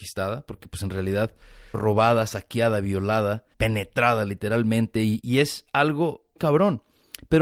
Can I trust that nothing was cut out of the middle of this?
no; 4 cuts; at 1.7 s, 3.5 s, 5.2 s, 6.4 s

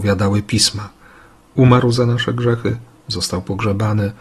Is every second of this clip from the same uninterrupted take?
yes; 0 cuts

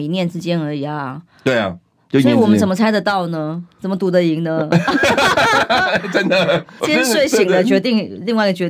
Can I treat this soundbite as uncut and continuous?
no; 1 cut; at 6.8 s

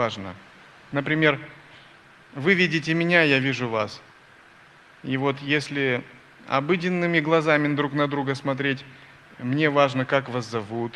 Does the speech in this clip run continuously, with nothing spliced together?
yes; 0 cuts

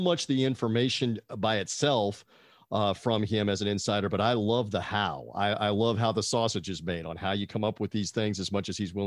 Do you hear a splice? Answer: no; 0 cuts

